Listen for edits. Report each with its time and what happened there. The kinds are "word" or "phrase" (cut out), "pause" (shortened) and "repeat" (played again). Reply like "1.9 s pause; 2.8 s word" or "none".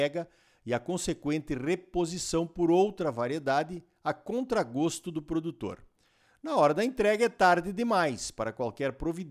none